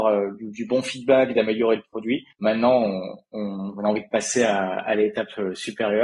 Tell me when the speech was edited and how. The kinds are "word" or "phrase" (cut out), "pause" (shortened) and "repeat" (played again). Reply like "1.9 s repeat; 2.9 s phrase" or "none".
2.3 s pause